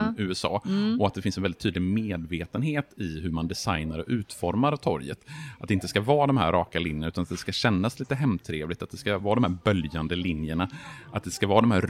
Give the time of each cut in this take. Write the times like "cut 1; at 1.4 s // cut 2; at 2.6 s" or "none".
none